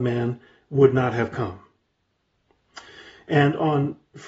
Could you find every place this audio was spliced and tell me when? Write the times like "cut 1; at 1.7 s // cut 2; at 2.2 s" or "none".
none